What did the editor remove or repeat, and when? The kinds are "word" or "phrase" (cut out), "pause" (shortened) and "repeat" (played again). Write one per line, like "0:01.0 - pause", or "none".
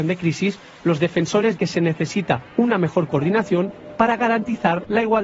0:01.6 - word
0:02.5 - pause